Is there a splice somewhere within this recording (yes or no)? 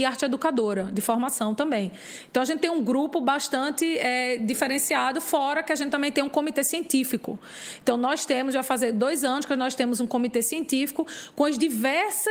no